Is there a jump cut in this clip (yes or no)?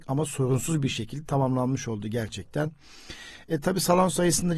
no